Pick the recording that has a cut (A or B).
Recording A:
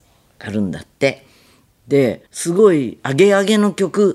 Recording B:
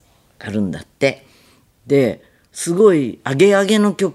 A